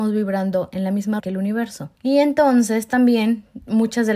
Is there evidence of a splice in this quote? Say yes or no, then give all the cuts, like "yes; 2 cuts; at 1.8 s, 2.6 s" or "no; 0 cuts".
yes; 2 cuts; at 1.2 s, 1.9 s